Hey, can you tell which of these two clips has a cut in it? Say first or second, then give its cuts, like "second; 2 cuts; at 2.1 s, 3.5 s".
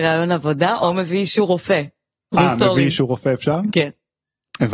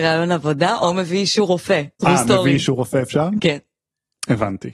second; 1 cut; at 1.9 s